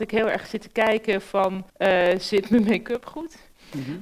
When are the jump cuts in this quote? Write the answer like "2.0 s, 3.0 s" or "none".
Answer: 1.7 s